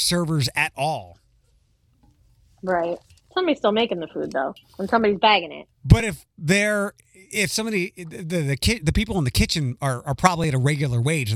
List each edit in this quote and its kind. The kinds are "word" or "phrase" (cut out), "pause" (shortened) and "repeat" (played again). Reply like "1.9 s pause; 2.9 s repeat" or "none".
3.2 s pause; 4.6 s pause